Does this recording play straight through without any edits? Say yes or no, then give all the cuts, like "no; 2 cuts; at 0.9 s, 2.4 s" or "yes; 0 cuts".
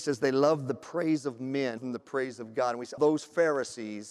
no; 2 cuts; at 1.8 s, 3.0 s